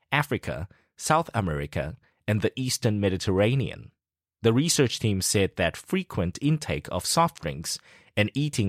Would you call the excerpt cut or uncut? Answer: uncut